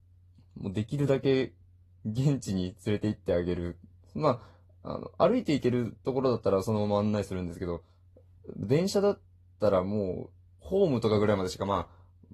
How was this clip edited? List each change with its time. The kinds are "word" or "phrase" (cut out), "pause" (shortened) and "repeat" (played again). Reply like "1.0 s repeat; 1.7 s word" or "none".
none